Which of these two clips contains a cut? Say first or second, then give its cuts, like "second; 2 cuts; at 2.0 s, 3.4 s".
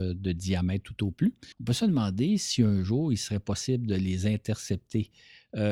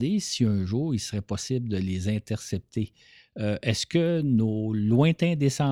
first; 1 cut; at 1.5 s